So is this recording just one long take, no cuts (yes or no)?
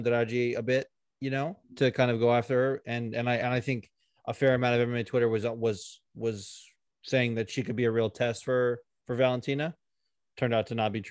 no